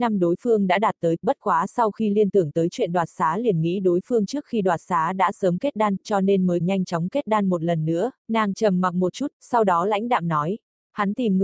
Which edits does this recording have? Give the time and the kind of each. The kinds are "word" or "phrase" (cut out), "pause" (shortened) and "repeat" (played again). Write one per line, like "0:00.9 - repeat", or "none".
0:01.2 - phrase
0:06.6 - phrase
0:08.2 - pause